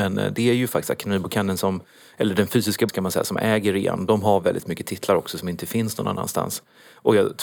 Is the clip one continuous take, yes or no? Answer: no